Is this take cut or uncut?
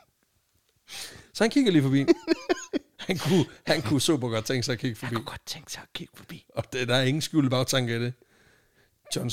uncut